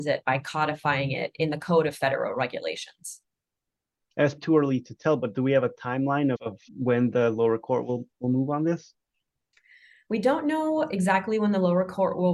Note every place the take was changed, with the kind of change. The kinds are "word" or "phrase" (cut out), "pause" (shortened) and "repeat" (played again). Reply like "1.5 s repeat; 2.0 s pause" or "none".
4.4 s word; 6.3 s word; 6.7 s pause